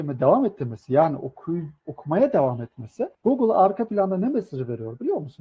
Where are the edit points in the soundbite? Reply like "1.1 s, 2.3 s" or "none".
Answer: 3.1 s

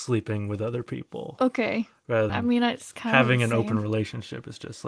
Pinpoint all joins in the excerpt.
2.3 s

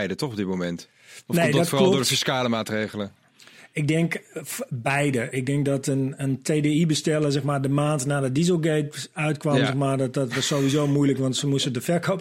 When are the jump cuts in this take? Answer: none

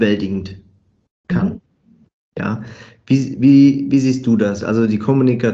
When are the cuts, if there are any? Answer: none

